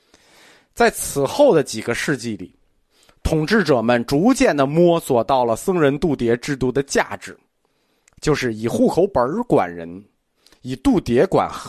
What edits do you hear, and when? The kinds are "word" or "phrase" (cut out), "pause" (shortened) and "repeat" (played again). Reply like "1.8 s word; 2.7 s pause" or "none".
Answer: none